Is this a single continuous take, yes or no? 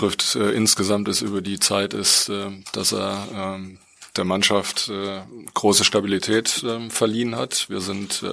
yes